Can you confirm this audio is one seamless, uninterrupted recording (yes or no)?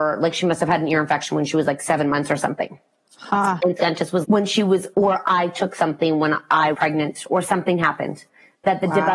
no